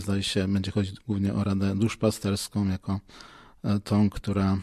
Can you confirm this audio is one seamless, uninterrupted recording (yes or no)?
yes